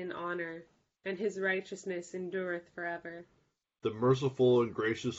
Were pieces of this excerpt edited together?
no; 0 cuts

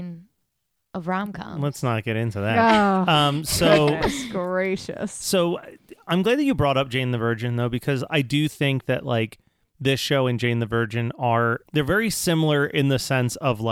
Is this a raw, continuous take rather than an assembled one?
yes; 0 cuts

